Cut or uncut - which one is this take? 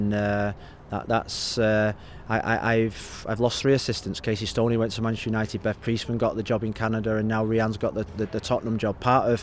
uncut